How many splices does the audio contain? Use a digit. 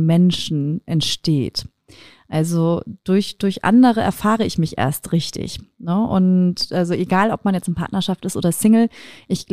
0